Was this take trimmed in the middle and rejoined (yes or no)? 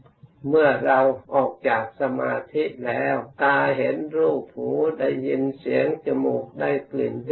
yes